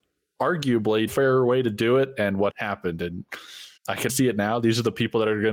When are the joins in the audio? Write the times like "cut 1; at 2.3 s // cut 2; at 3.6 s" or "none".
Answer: cut 1; at 1.1 s // cut 2; at 2.5 s // cut 3; at 3.8 s // cut 4; at 4.1 s